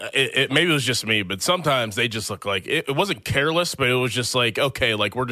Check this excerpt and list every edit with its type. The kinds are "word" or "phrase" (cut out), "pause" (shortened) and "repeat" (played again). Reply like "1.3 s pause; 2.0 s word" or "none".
none